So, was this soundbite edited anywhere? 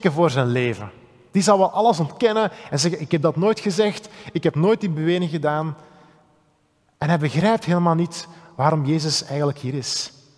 no; 0 cuts

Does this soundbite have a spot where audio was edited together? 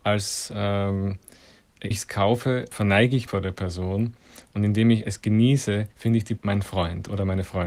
yes; 6 cuts; at 1.9 s, 2.7 s, 3.3 s, 5.0 s, 5.9 s, 6.4 s

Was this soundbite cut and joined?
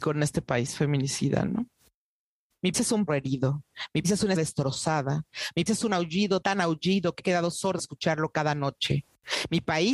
yes; 8 cuts; at 2.7 s, 3.1 s, 4.0 s, 4.4 s, 5.7 s, 6.4 s, 7.2 s, 7.8 s

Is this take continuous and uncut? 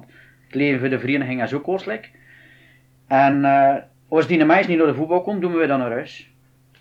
yes; 0 cuts

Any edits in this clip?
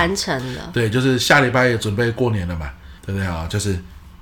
yes; 1 cut; at 3.0 s

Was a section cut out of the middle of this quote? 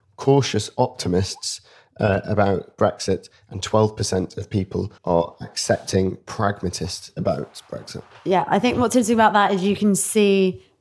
yes; 1 cut; at 5.0 s

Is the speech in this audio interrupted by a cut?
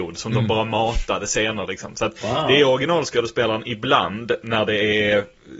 no; 0 cuts

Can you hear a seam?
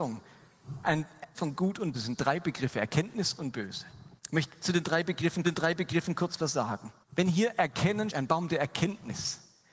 yes; 7 cuts; at 1.3 s, 1.9 s, 3.4 s, 4.2 s, 5.4 s, 7.0 s, 8.1 s

